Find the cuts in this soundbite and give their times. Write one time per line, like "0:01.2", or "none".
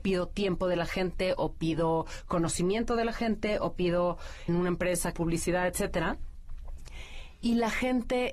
0:04.5
0:05.1